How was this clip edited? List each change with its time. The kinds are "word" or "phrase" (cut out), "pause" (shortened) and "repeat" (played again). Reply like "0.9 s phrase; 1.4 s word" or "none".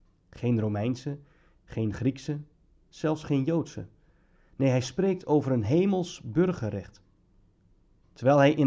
none